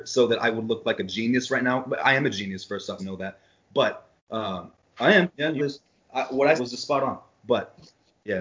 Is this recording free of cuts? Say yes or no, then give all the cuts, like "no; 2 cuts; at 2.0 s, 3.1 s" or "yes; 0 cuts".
no; 4 cuts; at 3.0 s, 4.2 s, 5.6 s, 6.6 s